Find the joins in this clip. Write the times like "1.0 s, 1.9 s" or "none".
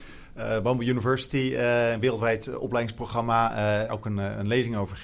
3.9 s